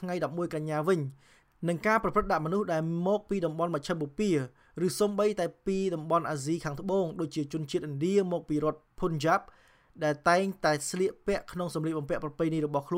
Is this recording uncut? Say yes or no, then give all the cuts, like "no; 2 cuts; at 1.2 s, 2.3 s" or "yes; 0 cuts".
yes; 0 cuts